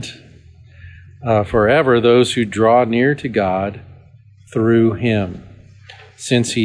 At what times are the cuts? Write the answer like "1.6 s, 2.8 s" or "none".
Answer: none

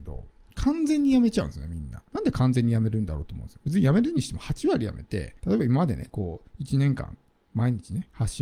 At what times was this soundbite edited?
2.1 s, 5.4 s

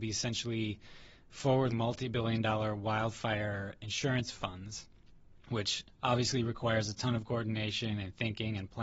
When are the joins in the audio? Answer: 1.7 s

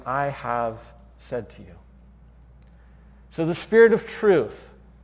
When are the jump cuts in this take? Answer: none

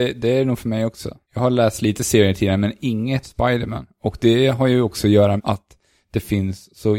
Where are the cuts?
3.2 s, 5.4 s

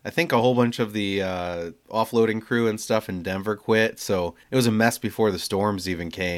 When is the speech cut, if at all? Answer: 4.4 s

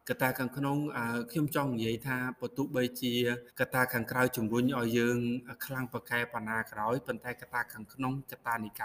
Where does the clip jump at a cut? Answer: 3.5 s

